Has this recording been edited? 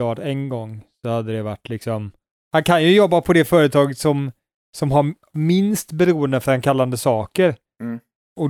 no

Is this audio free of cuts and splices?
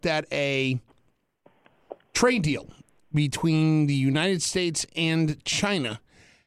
yes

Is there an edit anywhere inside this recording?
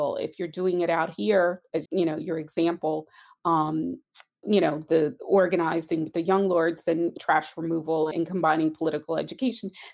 yes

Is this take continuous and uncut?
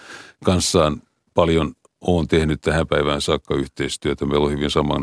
yes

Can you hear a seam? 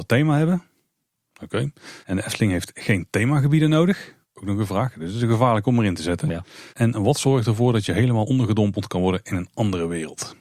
yes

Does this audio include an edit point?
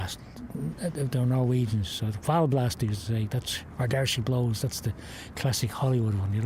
no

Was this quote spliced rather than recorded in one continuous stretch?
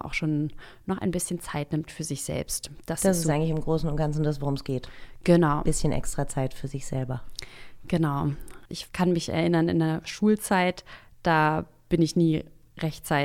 yes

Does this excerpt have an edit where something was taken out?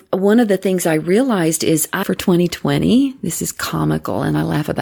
yes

